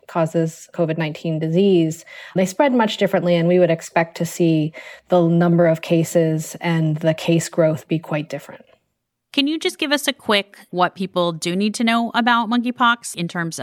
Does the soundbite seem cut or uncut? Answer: uncut